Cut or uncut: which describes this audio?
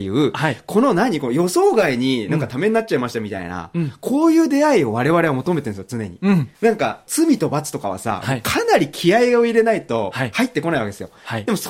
cut